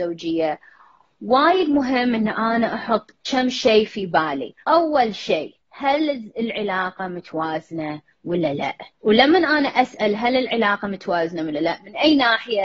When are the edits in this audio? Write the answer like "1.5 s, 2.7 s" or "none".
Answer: 3.2 s, 4.6 s, 5.6 s, 8.9 s